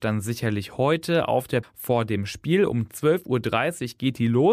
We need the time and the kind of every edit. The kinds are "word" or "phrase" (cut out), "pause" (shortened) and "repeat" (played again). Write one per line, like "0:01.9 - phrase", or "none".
0:01.6 - word